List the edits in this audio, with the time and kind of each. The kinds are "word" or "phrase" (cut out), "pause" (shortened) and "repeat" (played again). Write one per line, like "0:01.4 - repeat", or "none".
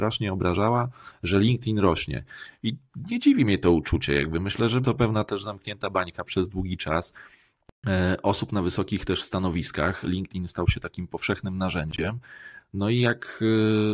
0:04.8 - word
0:06.3 - word
0:10.0 - word